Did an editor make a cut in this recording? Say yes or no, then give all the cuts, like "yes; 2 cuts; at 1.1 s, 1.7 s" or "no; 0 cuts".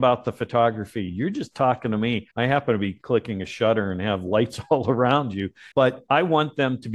yes; 2 cuts; at 2.3 s, 5.7 s